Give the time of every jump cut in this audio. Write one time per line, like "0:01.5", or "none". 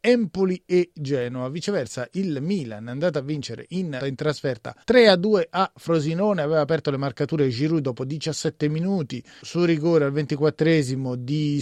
0:04.0
0:04.8
0:09.4